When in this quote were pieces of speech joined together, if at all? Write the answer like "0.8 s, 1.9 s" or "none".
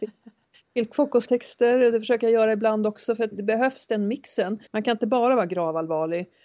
1.3 s, 3.3 s, 4.7 s